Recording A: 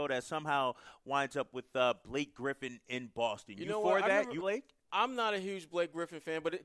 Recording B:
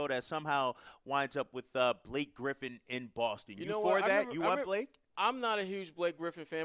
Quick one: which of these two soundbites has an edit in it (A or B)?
A